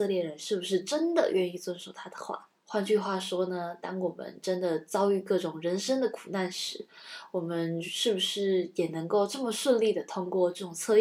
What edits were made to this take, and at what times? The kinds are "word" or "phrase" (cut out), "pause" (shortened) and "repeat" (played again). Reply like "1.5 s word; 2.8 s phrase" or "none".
2.6 s pause